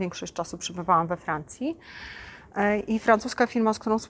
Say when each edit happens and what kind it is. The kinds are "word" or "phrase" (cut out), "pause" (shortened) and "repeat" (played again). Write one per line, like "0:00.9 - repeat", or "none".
none